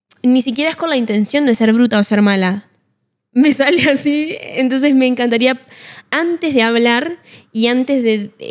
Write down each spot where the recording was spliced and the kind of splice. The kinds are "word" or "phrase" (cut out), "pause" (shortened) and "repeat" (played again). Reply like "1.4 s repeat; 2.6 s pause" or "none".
none